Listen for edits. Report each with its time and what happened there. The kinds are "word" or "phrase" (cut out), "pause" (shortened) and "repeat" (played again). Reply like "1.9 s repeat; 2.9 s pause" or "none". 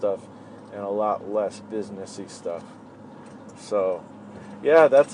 none